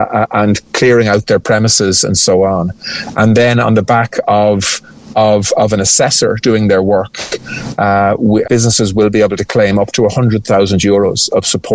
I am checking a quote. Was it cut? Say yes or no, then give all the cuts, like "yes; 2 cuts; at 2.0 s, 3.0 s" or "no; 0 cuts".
yes; 1 cut; at 8.4 s